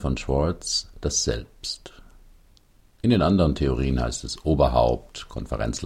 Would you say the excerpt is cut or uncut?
uncut